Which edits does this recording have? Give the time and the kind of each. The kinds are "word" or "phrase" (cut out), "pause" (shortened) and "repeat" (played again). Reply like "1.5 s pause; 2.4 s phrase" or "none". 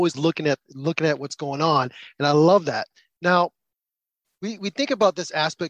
none